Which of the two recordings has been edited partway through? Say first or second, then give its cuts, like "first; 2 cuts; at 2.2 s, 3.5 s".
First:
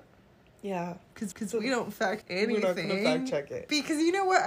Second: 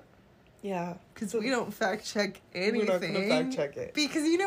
first; 2 cuts; at 1.3 s, 2.2 s